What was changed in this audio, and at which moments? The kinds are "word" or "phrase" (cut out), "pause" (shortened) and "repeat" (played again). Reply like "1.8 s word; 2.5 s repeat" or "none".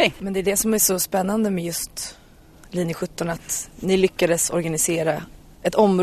none